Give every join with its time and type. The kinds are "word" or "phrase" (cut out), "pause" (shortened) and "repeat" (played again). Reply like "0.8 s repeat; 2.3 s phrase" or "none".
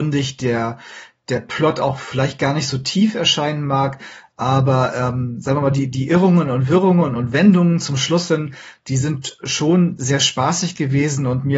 none

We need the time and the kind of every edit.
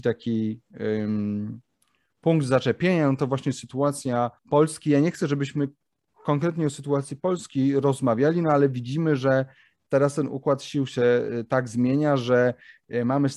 4.4 s pause

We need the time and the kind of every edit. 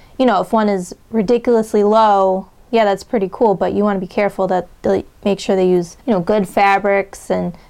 1.0 s pause; 6.0 s pause

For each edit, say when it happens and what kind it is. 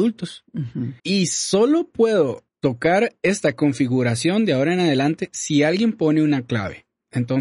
1.0 s pause; 2.5 s pause

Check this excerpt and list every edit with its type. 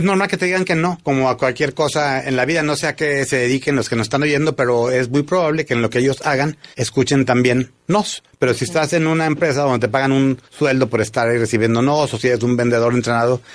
6.7 s pause; 10.5 s pause

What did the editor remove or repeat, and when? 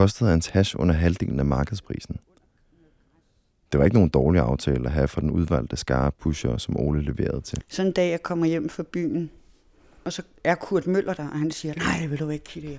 none

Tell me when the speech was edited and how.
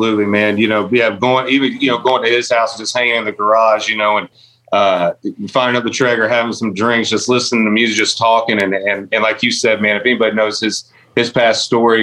none

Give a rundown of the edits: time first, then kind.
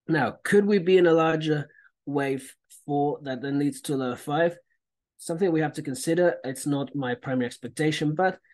none

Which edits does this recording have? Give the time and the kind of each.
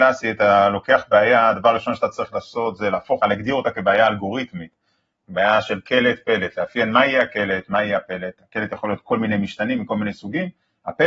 3.2 s phrase

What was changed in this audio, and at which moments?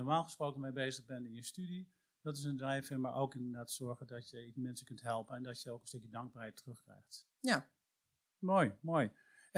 none

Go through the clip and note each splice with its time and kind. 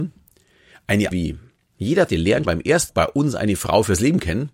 1.1 s word; 2.1 s word; 2.4 s word; 2.9 s word

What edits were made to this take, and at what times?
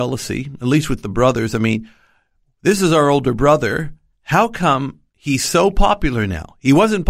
none

